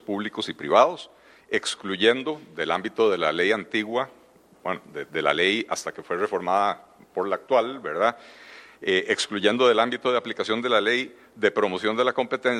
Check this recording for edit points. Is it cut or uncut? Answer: uncut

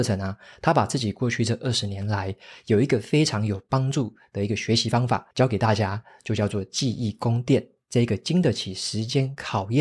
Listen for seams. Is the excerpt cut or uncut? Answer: cut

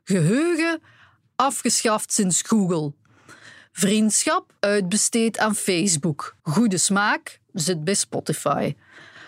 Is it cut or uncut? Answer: cut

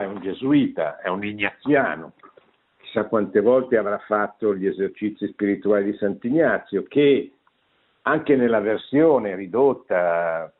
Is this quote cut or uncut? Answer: uncut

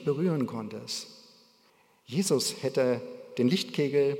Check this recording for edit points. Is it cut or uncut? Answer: cut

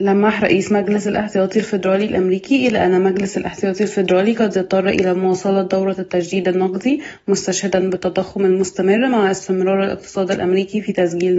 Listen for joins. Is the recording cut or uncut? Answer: uncut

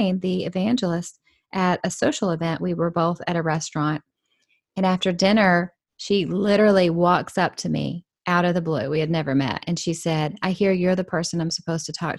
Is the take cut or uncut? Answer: uncut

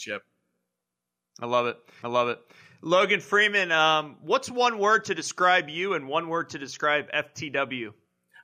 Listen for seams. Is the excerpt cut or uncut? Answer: cut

